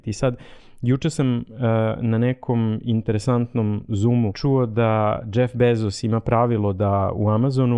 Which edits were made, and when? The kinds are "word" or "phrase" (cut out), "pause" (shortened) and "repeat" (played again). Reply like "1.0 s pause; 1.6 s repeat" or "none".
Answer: 4.3 s word